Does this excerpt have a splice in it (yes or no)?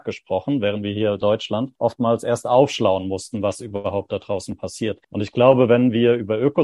yes